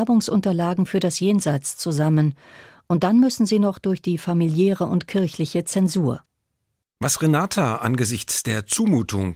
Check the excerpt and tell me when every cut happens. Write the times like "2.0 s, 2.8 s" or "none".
none

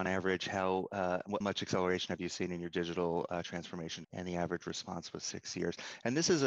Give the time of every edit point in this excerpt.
1.4 s, 4.0 s

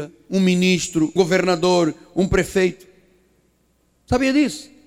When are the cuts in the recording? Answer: 1.2 s

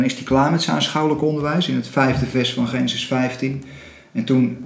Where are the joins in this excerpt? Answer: none

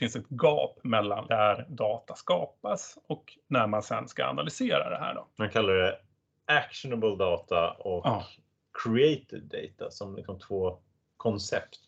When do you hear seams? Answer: 1.3 s, 5.3 s

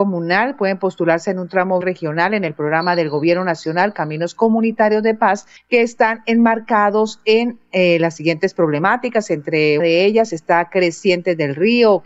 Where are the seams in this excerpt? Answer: 1.8 s, 9.8 s

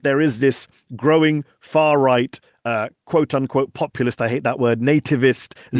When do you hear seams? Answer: none

